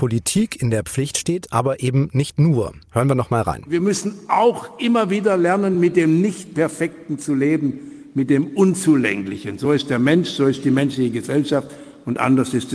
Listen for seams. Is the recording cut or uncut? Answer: uncut